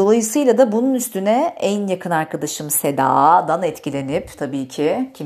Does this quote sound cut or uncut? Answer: uncut